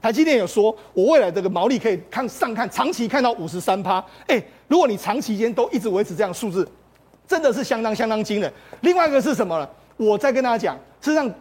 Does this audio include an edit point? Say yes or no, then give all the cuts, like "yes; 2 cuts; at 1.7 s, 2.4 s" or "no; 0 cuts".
no; 0 cuts